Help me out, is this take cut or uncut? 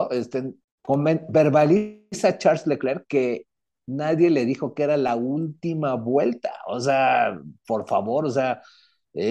uncut